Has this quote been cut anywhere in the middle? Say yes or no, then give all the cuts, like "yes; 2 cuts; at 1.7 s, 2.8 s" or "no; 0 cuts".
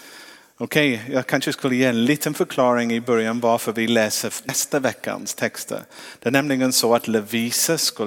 no; 0 cuts